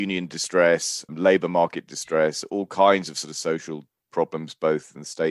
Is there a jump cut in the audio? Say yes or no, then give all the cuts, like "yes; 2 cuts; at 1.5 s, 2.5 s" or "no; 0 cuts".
yes; 1 cut; at 1.1 s